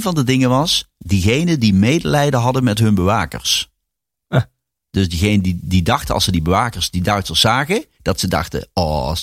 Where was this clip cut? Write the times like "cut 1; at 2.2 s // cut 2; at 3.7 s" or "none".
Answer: none